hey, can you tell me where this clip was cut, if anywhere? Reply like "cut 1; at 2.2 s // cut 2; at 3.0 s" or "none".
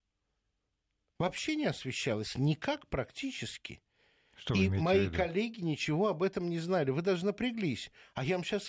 none